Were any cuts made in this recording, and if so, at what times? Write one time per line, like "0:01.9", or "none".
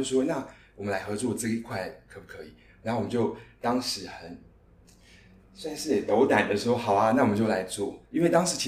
none